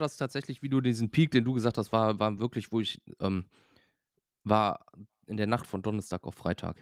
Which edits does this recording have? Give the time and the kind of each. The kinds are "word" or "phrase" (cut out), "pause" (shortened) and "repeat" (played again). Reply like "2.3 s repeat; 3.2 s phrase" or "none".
none